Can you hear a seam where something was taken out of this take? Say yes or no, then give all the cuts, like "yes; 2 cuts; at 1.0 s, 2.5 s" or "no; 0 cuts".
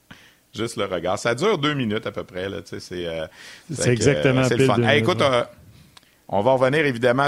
no; 0 cuts